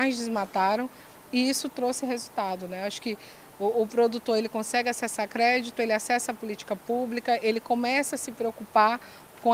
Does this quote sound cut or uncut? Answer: uncut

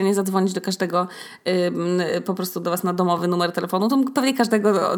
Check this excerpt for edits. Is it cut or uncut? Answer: uncut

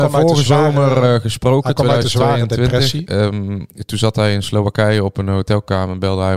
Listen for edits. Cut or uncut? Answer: uncut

